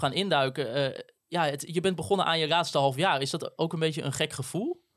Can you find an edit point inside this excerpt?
no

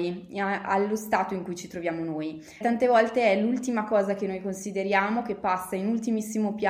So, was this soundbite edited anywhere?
yes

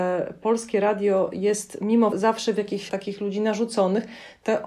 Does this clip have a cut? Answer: yes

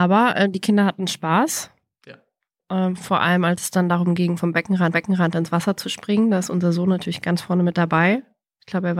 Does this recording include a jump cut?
yes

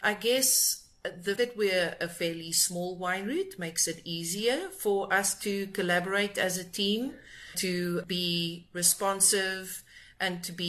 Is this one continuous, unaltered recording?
no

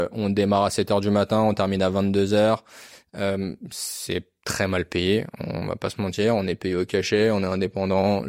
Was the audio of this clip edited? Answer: no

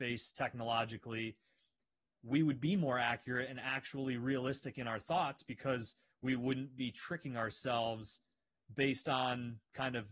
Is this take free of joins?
yes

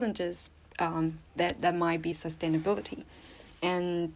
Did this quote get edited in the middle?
yes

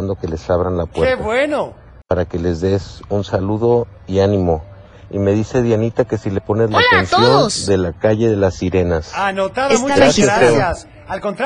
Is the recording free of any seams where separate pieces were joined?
yes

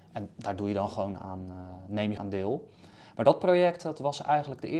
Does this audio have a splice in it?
yes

